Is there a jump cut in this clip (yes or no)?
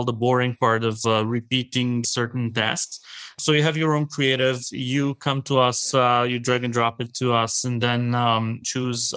no